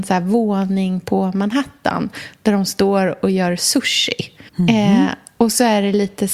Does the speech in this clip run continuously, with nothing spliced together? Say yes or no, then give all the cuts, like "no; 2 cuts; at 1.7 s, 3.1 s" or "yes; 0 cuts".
no; 1 cut; at 4.5 s